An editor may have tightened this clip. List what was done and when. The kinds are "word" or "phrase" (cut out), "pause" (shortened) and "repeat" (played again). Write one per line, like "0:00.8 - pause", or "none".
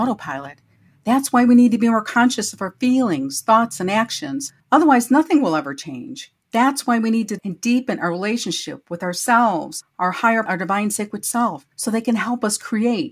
0:04.6 - pause
0:06.4 - pause
0:07.4 - word
0:10.5 - phrase
0:11.7 - pause

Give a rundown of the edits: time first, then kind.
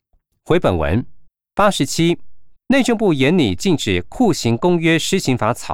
0:01.3 - pause
0:02.6 - pause

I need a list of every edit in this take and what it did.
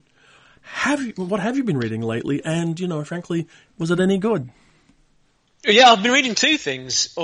none

